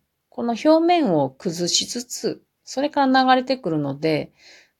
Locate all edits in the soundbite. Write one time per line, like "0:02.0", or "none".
0:02.5

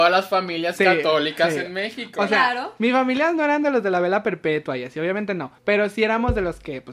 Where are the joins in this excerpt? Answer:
0:05.6

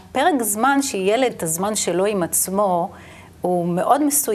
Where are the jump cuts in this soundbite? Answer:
0:01.3

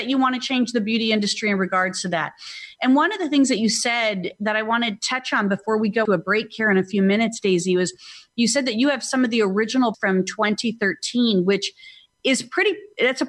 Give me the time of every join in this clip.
0:06.0
0:09.9

